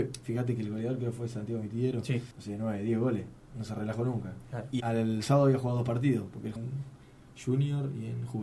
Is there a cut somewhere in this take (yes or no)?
yes